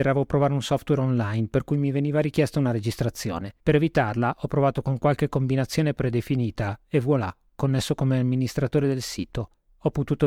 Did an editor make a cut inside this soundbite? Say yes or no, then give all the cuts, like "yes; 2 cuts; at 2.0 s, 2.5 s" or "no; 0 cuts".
yes; 1 cut; at 3.6 s